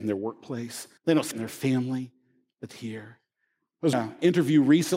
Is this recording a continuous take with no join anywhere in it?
no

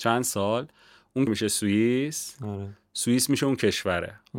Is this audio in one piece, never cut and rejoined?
no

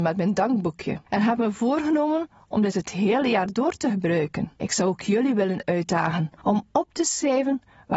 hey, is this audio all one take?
no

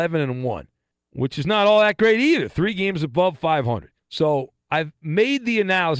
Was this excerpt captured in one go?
no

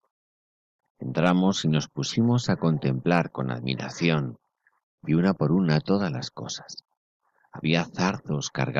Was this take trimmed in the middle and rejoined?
no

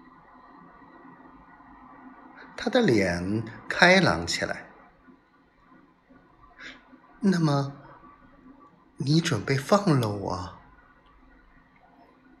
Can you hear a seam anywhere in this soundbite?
no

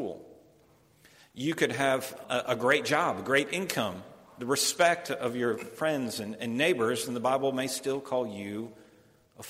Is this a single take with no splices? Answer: no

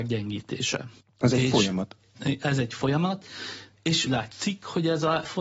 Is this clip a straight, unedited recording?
no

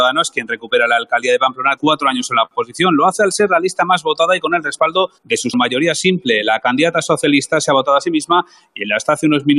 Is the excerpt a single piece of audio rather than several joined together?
no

